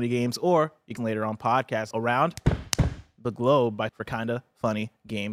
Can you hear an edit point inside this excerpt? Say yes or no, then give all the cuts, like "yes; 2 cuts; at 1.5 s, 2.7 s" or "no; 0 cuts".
yes; 3 cuts; at 1.0 s, 1.9 s, 3.9 s